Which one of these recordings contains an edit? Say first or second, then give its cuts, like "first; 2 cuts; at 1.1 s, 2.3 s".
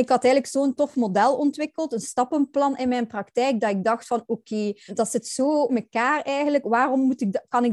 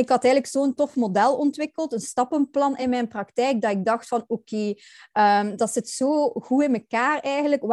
first; 2 cuts; at 4.9 s, 5.7 s